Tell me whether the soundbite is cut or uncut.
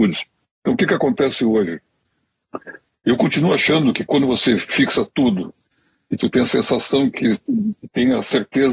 uncut